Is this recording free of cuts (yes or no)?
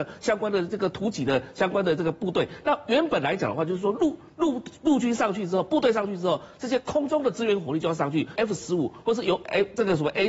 no